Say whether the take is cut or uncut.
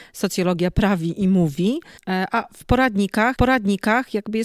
cut